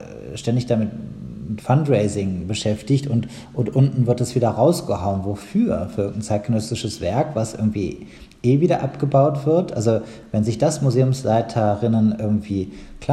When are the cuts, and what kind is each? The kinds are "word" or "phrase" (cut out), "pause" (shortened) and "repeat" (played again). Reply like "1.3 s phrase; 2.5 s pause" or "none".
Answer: none